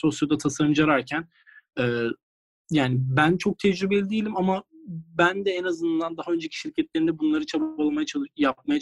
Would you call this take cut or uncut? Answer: uncut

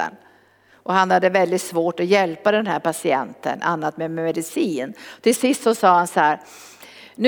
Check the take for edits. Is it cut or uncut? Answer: uncut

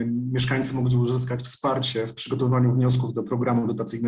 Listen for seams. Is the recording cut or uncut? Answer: uncut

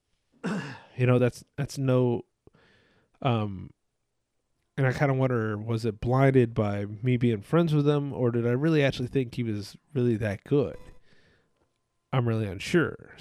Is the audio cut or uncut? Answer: uncut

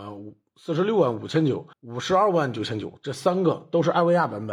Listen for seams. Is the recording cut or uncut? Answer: cut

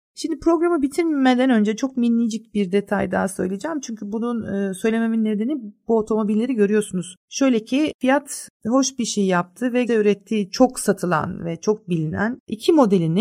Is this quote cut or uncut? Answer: cut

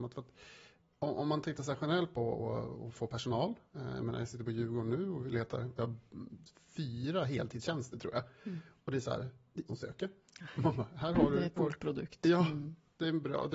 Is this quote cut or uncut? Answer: cut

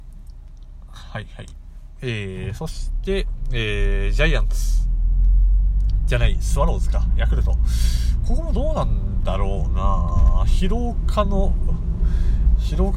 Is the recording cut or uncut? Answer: uncut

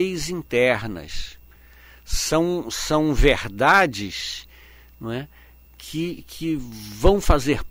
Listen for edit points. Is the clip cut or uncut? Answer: uncut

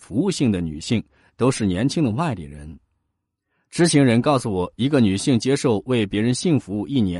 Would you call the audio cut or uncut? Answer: uncut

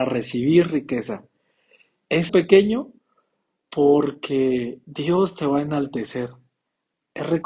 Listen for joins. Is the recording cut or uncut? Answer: cut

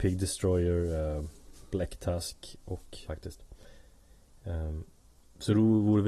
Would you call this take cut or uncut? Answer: cut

